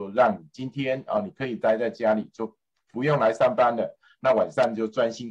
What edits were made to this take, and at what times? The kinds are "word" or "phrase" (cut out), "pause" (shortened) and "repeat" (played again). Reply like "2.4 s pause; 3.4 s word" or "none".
none